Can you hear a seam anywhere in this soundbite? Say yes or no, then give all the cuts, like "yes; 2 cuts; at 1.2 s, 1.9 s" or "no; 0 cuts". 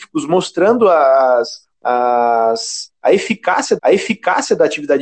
yes; 2 cuts; at 1.8 s, 3.8 s